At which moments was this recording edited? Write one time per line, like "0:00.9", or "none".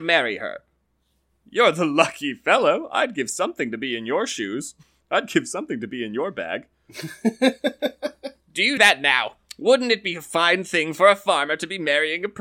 0:08.8